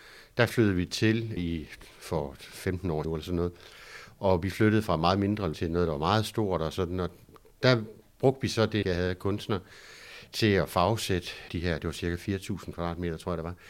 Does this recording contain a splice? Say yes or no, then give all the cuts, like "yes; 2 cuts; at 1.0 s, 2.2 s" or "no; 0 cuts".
yes; 5 cuts; at 1.4 s, 3.0 s, 5.5 s, 8.8 s, 11.5 s